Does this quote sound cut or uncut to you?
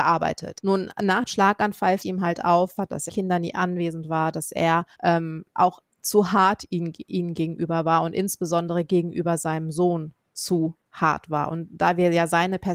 cut